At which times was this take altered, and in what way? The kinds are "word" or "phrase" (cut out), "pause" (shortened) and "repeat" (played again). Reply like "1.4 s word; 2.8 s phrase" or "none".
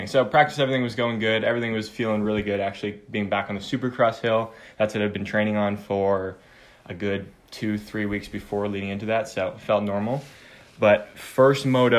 none